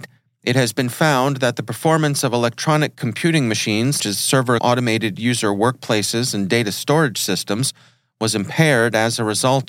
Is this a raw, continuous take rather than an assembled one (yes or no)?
no